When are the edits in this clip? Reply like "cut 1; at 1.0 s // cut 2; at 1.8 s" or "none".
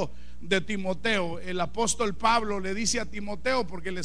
none